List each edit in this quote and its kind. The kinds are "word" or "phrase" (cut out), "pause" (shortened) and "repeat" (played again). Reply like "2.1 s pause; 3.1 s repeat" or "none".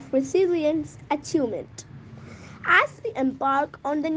1.1 s word